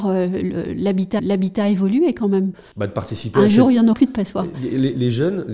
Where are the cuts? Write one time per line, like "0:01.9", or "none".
0:01.2
0:03.9